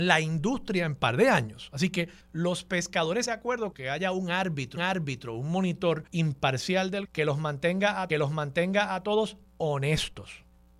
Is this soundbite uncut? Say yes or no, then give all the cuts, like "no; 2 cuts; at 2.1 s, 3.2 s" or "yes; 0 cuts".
no; 7 cuts; at 2.2 s, 3.3 s, 3.7 s, 4.8 s, 6.1 s, 7.0 s, 8.1 s